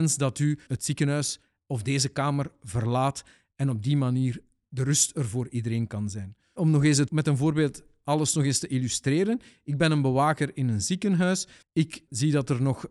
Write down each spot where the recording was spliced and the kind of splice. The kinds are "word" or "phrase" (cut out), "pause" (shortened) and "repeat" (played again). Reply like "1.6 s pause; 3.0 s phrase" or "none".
11.6 s pause